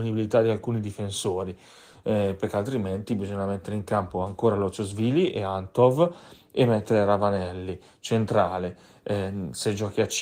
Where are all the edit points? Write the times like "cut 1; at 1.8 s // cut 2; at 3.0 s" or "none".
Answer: none